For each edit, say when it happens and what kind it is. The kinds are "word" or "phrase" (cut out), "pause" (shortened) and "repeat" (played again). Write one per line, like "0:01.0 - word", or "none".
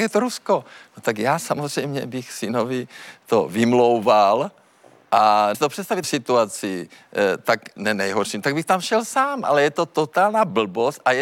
0:05.5 - word
0:06.0 - word
0:07.8 - word